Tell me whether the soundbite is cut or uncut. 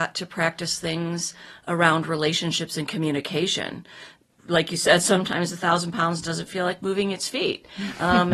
uncut